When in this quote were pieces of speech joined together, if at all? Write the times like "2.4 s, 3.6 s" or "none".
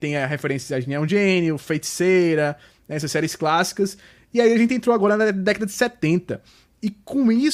none